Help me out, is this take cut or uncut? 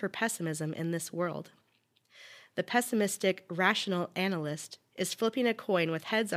uncut